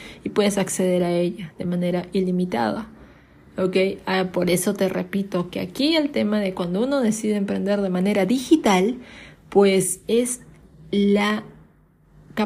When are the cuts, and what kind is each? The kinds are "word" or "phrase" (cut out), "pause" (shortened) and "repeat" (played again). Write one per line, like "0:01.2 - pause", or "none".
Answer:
none